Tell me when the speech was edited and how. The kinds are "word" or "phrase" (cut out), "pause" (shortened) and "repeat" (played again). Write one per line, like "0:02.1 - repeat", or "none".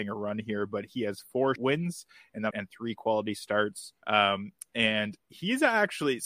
0:01.6 - word
0:02.5 - phrase
0:04.0 - pause